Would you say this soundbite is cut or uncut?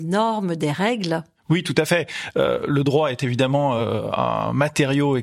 uncut